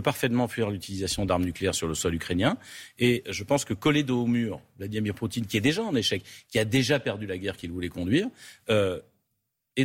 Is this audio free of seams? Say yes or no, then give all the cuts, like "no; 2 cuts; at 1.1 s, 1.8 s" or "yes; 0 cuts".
yes; 0 cuts